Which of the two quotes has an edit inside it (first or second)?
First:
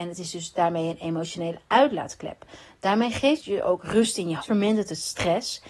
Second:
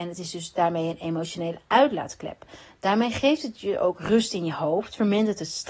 first